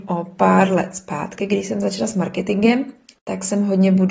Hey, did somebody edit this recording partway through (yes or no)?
no